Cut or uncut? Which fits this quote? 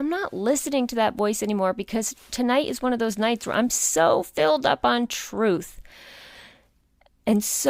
uncut